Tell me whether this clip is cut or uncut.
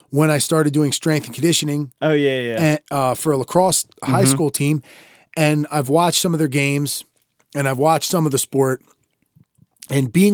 uncut